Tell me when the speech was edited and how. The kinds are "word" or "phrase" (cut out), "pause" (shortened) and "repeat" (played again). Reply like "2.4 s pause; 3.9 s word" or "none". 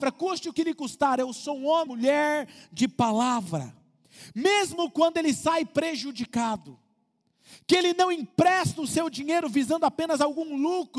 1.9 s word